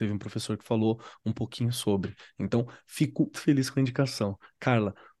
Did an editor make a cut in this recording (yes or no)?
yes